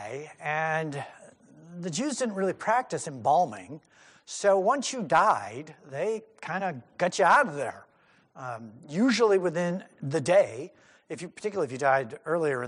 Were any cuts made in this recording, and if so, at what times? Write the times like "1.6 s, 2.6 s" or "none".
none